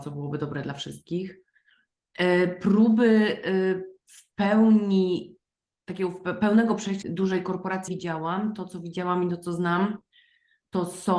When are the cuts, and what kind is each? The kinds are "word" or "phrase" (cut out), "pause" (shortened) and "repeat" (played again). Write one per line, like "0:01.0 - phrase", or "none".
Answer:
0:07.0 - phrase
0:07.9 - word